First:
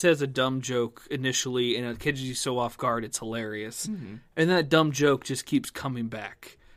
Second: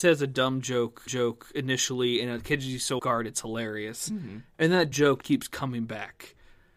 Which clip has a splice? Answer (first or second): second